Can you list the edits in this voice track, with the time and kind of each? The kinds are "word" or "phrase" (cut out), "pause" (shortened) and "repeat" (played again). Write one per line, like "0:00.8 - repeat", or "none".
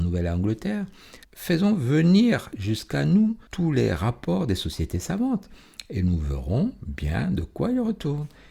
0:01.2 - pause
0:03.5 - pause